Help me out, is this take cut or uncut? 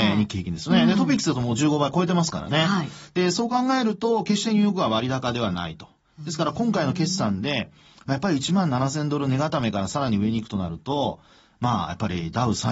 uncut